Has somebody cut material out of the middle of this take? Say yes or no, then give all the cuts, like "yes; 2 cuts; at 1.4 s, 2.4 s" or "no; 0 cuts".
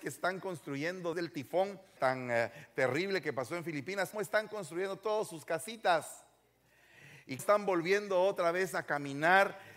yes; 4 cuts; at 1.1 s, 2.0 s, 4.1 s, 7.4 s